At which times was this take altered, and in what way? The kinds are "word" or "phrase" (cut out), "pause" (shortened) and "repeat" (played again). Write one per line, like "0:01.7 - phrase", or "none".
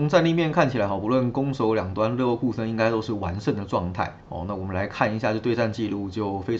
0:04.2 - pause